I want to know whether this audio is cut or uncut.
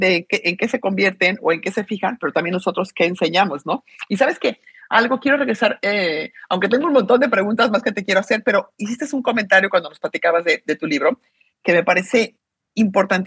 uncut